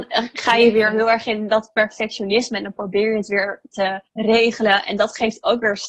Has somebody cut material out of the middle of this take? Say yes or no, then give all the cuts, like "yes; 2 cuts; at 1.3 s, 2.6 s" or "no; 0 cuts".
yes; 1 cut; at 4.1 s